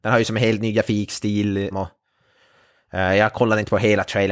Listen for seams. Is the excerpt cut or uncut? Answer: cut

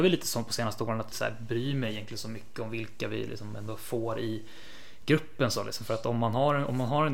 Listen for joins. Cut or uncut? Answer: cut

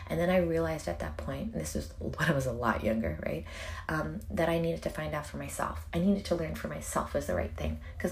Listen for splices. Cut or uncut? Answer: uncut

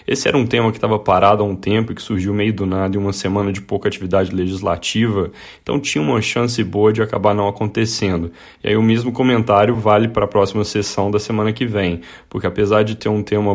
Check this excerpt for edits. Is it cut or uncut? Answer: uncut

